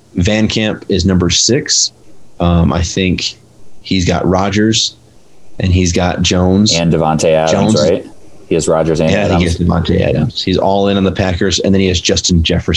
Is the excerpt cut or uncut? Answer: uncut